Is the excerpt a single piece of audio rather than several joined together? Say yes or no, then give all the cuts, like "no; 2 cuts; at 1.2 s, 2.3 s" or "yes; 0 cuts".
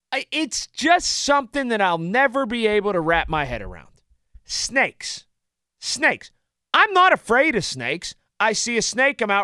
yes; 0 cuts